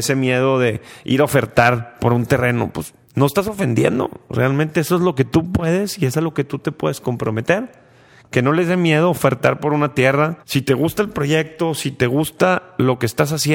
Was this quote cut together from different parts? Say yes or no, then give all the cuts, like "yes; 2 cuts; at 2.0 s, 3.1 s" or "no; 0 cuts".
yes; 2 cuts; at 3.0 s, 10.4 s